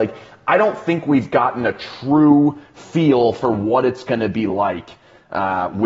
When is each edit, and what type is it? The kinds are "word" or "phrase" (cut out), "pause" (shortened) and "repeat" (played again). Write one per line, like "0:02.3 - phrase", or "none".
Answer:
none